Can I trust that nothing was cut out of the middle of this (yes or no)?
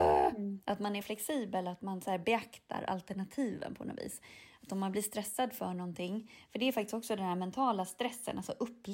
no